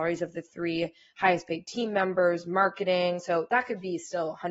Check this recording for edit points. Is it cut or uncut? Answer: uncut